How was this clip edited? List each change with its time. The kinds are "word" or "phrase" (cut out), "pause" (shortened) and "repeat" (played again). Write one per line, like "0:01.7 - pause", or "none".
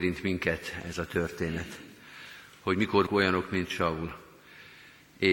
0:03.1 - word

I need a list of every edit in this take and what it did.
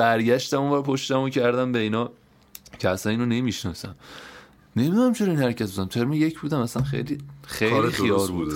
none

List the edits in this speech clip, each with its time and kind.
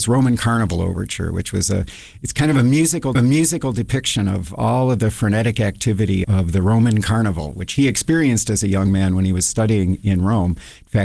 0:03.1 - repeat
0:06.2 - word

